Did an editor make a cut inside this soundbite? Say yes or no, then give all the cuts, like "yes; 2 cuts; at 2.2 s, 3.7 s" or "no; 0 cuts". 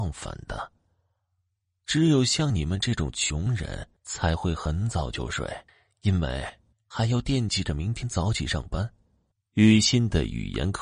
yes; 4 cuts; at 4.0 s, 5.7 s, 6.7 s, 9.3 s